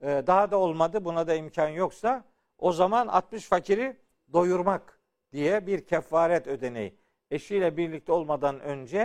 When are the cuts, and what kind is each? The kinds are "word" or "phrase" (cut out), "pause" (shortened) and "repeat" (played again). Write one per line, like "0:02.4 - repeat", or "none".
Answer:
none